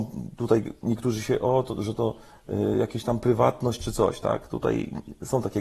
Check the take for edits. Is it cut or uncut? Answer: uncut